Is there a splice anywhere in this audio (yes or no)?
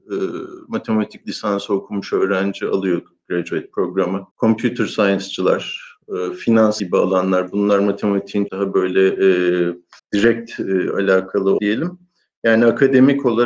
yes